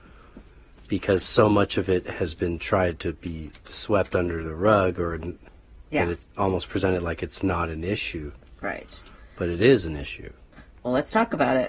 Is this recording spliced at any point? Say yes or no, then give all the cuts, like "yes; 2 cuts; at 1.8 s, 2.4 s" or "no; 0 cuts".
no; 0 cuts